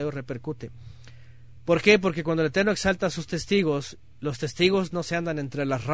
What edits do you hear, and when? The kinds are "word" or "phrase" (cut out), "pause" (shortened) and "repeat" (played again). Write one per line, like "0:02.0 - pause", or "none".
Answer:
none